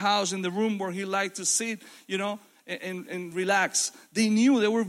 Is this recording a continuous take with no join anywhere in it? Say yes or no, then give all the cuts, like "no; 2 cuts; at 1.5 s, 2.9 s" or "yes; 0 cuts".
yes; 0 cuts